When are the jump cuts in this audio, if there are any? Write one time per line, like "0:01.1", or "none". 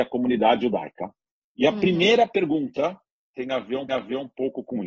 0:03.9